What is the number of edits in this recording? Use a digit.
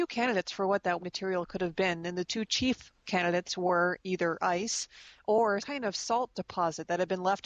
2